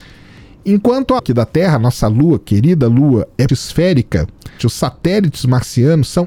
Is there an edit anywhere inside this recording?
yes; 3 cuts; at 1.2 s, 3.5 s, 4.6 s

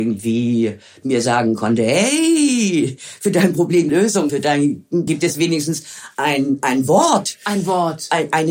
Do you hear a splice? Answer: yes; 3 cuts; at 3.9 s, 4.3 s, 5.1 s

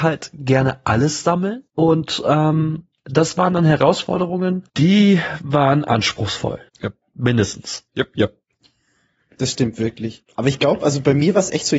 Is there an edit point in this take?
yes; 4 cuts; at 1.7 s, 4.7 s, 6.7 s, 7.9 s

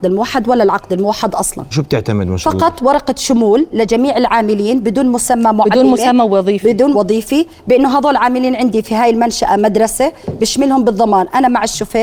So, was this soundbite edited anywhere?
yes; 2 cuts; at 1.7 s, 6.9 s

